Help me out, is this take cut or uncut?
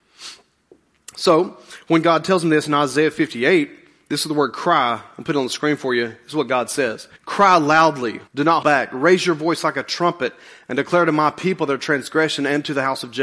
cut